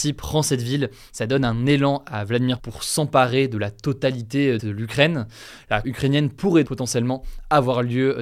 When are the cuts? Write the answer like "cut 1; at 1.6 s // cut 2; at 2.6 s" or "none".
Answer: cut 1; at 2.6 s // cut 2; at 4.6 s // cut 3; at 5.8 s // cut 4; at 6.6 s